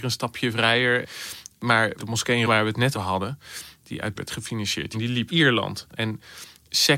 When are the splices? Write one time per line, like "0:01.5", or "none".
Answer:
0:01.9
0:02.5
0:02.9
0:04.2
0:04.9
0:05.3